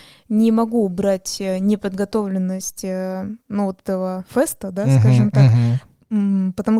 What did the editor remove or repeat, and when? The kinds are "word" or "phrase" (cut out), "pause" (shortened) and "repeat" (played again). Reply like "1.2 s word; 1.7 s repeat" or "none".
none